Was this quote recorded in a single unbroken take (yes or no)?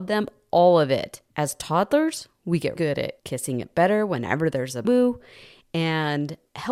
no